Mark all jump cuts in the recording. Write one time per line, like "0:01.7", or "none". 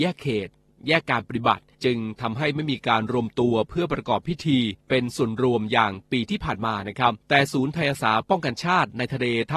0:01.7
0:04.8
0:07.2